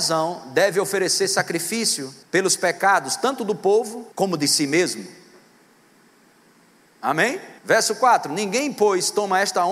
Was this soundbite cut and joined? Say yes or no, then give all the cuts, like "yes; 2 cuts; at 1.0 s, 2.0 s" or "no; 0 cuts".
yes; 3 cuts; at 2.2 s, 4.1 s, 7.6 s